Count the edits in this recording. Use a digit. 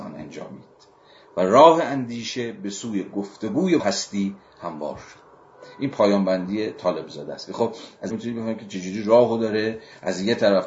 2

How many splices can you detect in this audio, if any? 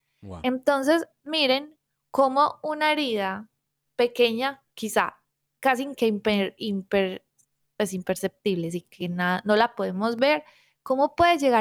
0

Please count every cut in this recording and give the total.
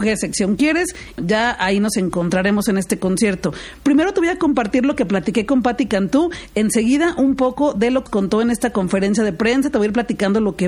2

